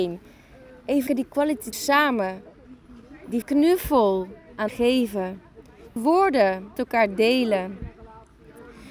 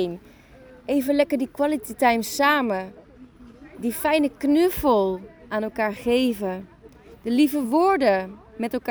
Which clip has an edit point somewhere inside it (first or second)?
first